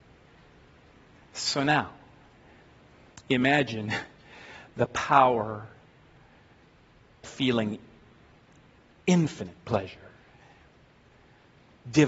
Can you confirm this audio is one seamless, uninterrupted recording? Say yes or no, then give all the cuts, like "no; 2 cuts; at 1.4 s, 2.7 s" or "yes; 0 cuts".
no; 1 cut; at 7.2 s